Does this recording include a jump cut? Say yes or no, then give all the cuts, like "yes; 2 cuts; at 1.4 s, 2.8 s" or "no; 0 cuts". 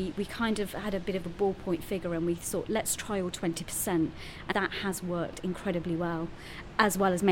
yes; 1 cut; at 4.5 s